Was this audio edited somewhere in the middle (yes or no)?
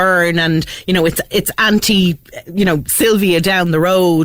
no